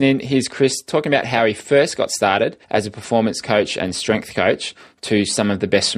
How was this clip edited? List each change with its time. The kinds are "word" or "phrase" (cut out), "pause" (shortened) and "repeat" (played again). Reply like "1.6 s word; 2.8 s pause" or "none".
2.6 s pause